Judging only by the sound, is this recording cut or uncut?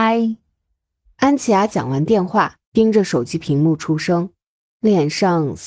cut